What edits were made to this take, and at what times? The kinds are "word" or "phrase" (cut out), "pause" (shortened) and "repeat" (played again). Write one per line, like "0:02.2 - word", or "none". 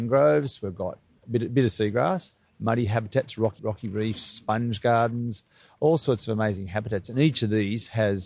0:03.6 - phrase